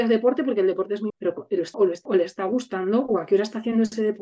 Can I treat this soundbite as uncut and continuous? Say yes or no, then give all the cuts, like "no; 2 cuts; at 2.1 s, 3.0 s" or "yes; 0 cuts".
no; 3 cuts; at 1.1 s, 1.7 s, 2.1 s